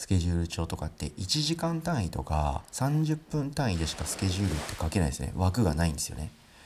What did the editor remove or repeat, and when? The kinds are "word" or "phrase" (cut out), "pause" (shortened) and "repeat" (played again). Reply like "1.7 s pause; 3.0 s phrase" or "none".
2.7 s pause